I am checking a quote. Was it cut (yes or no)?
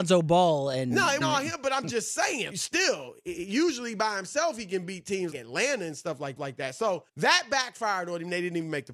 yes